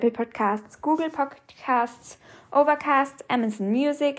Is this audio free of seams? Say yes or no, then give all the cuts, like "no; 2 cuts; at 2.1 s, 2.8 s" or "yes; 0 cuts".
yes; 0 cuts